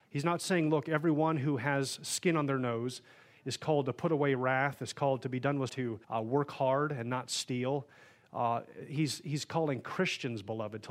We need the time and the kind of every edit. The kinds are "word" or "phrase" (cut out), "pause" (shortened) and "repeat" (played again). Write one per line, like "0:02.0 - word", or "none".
0:05.7 - phrase
0:06.0 - pause